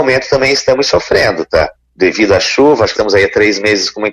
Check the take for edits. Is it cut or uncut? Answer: cut